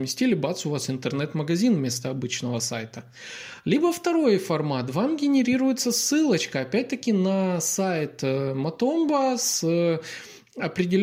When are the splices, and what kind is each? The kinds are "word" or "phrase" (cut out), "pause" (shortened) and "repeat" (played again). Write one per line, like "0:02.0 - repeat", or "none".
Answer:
none